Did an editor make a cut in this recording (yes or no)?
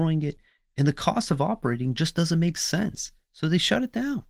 no